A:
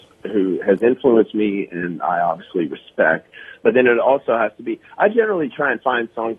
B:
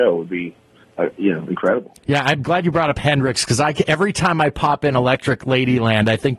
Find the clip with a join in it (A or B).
B